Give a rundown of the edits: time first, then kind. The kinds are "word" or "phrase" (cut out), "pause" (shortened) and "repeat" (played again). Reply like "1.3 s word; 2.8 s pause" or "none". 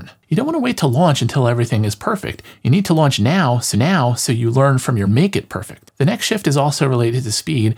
3.7 s repeat; 5.0 s phrase

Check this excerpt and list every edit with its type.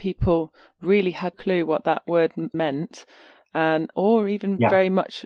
1.3 s word; 2.5 s word; 3.9 s word

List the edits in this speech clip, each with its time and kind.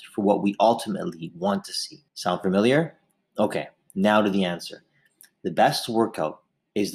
2.1 s pause

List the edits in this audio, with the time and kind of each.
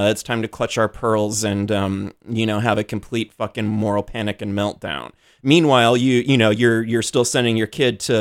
none

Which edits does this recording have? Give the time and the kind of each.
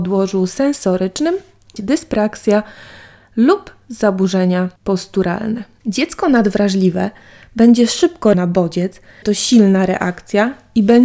1.8 s phrase; 4.8 s pause; 8.3 s word; 9.2 s word

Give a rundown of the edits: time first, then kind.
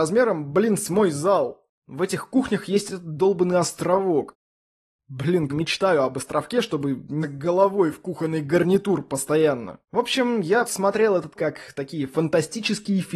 5.5 s phrase; 7.2 s word; 9.8 s pause; 10.6 s word; 11.4 s word

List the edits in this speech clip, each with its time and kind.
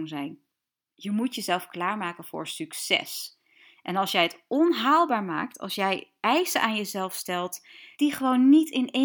7.9 s pause

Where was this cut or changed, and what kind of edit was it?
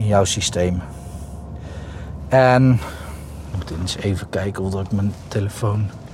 none

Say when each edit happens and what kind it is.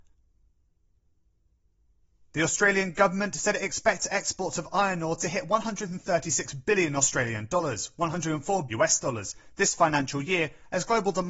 8.7 s word

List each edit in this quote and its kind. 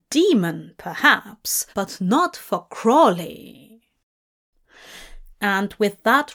1.7 s pause; 5.3 s pause

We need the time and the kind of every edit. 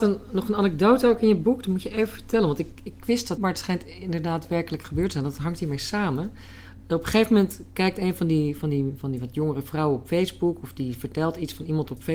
3.4 s word

